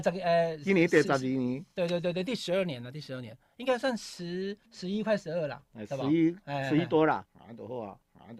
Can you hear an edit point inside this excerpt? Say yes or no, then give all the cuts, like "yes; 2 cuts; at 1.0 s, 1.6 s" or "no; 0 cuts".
yes; 2 cuts; at 4.7 s, 7.3 s